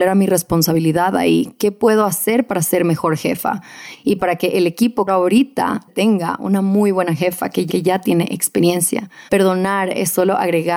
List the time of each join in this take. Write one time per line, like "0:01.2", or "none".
0:05.1
0:05.9
0:07.7
0:09.3